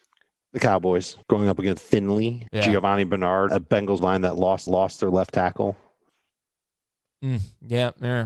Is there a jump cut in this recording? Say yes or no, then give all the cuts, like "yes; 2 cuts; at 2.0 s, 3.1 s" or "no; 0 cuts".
yes; 6 cuts; at 1.2 s, 1.8 s, 2.5 s, 3.5 s, 4.0 s, 4.7 s